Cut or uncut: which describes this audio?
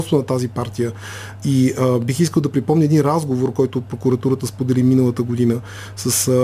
uncut